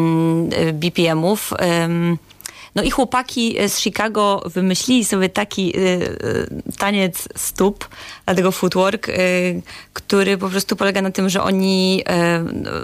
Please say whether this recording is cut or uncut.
uncut